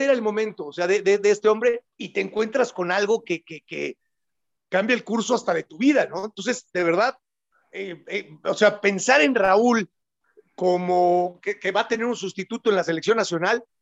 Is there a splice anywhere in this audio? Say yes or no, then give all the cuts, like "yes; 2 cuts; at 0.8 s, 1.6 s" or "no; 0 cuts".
yes; 1 cut; at 1.9 s